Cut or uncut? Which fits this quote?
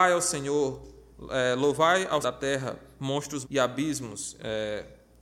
cut